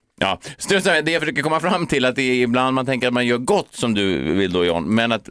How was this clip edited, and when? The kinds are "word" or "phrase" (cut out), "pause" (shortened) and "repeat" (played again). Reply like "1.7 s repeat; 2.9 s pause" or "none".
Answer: none